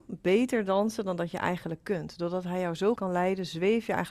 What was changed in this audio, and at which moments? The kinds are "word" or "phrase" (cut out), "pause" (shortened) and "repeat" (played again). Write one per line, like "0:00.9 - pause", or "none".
0:03.0 - word